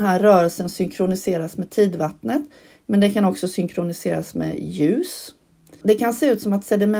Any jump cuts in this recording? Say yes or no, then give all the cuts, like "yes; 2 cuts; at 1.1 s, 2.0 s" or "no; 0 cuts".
no; 0 cuts